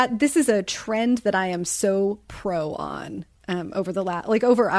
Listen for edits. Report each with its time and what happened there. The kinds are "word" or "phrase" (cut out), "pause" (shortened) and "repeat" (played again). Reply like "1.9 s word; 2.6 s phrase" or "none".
none